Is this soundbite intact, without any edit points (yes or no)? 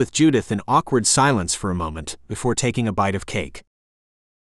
yes